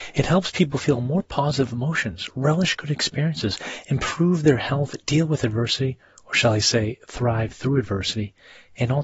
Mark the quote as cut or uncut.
uncut